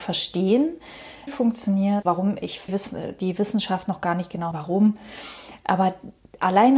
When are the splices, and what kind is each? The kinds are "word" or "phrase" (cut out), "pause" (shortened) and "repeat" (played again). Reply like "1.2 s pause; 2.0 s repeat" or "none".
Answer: 1.3 s phrase; 2.0 s word; 2.7 s phrase; 3.9 s word; 4.5 s word